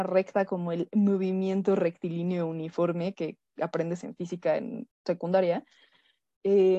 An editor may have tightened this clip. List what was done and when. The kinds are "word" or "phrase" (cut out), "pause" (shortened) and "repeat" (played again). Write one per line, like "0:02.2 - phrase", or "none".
0:04.9 - pause